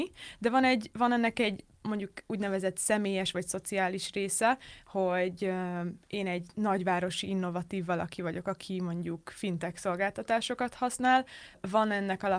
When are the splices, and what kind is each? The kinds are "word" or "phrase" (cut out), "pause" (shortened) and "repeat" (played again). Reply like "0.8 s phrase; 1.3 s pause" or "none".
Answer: none